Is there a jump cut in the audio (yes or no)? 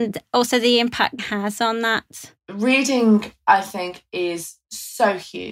yes